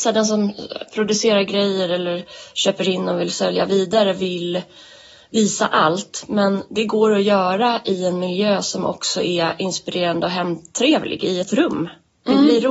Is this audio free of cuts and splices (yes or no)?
yes